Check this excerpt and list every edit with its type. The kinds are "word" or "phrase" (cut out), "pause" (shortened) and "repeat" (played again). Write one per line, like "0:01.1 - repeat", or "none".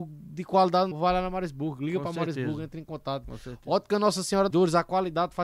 0:00.9 - phrase
0:04.5 - word